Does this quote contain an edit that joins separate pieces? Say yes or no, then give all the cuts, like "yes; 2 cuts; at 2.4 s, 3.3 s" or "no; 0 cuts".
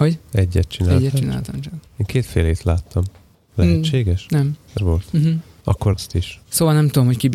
yes; 3 cuts; at 1.9 s, 4.8 s, 5.9 s